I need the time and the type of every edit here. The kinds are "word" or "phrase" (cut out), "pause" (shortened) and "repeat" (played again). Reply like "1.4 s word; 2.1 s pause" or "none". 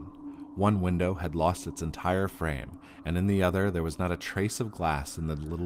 none